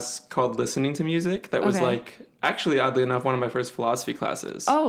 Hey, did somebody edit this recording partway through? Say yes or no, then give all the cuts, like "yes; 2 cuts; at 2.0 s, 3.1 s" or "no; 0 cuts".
no; 0 cuts